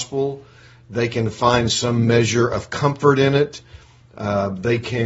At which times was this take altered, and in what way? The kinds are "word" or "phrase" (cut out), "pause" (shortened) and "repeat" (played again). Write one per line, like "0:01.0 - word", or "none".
none

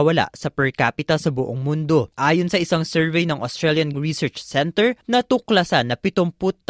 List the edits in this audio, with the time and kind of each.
0:02.1 - pause
0:03.9 - word
0:05.0 - pause

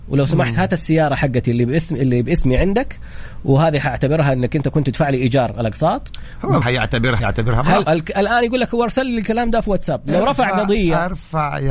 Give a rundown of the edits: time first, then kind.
0:06.6 - phrase
0:07.2 - word
0:07.8 - word

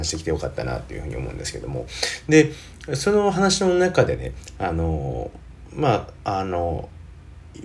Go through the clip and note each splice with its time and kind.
0:06.2 - pause

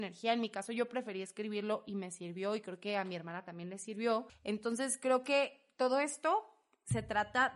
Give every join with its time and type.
none

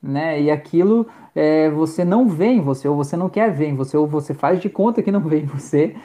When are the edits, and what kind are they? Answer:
none

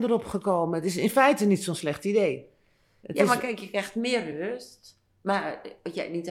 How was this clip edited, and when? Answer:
none

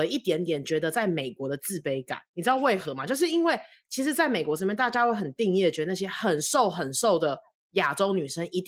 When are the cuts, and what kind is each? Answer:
0:02.3 - pause

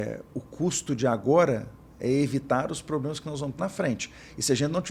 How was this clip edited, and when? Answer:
0:03.6 - word

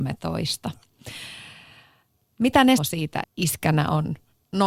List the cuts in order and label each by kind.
0:02.8 - word
0:03.2 - word

